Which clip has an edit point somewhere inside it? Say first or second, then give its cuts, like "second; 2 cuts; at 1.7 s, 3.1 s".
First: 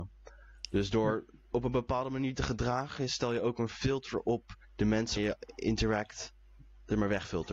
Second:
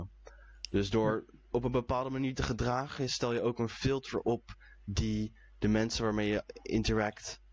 first; 2 cuts; at 4.6 s, 5.2 s